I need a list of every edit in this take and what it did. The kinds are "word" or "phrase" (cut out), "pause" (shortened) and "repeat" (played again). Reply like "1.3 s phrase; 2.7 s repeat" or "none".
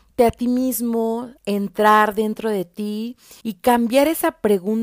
1.4 s pause; 3.4 s pause